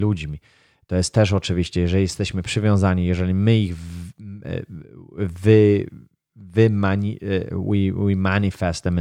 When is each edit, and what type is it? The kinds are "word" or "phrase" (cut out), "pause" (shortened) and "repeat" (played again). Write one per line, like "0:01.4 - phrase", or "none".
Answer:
none

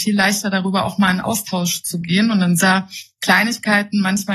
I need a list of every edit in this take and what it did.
0:02.6 - word

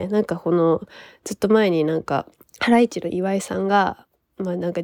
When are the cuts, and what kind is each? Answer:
0:02.4 - pause

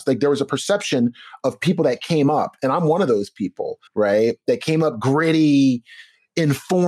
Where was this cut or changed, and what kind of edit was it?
0:03.9 - pause

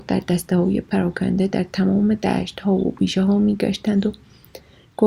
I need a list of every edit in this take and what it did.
none

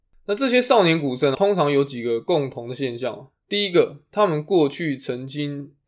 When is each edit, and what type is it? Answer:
0:01.3 - word

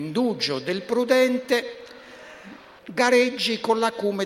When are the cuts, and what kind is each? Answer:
0:02.8 - word

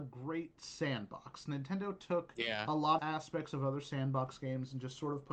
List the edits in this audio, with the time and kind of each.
0:03.0 - word

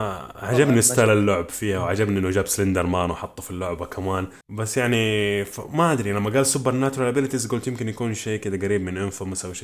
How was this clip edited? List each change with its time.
0:04.4 - pause

